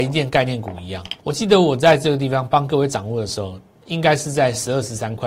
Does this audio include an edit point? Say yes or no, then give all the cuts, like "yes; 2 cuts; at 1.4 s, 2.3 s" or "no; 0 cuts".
yes; 1 cut; at 1.2 s